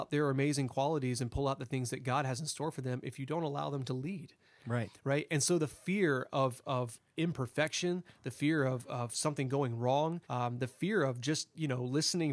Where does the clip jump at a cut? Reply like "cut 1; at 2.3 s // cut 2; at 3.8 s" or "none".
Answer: cut 1; at 10.2 s